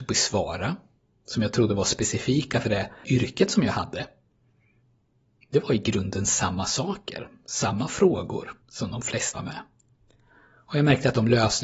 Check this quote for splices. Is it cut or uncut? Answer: cut